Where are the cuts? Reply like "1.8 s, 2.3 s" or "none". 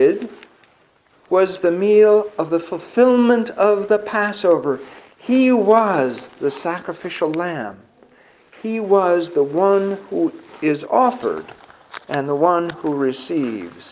none

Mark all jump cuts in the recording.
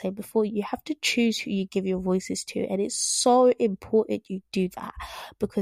none

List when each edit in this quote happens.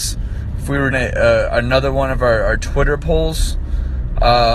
0.9 s

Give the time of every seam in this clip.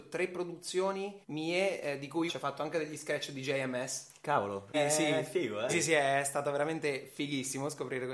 1.2 s, 2.3 s, 4.7 s, 5.7 s

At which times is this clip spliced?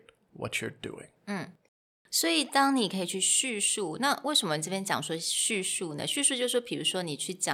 1.2 s

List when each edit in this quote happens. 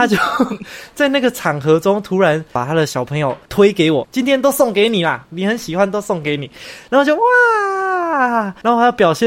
4.0 s

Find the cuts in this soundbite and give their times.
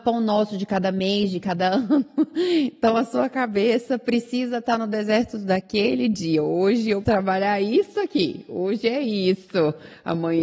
7.0 s

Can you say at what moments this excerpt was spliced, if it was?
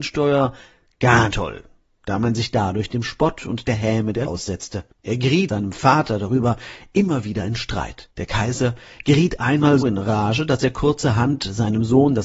1.3 s, 4.3 s, 5.5 s, 9.8 s

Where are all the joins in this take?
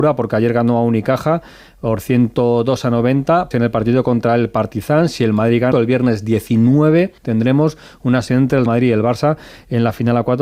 3.5 s, 5.7 s, 7.2 s, 8.3 s, 8.7 s

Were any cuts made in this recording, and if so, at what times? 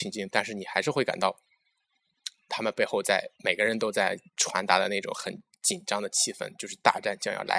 3.3 s, 4.3 s

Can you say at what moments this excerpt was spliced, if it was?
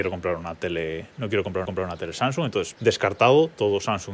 1.7 s, 2.7 s

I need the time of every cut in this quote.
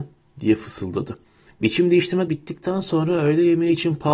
1.5 s, 2.3 s

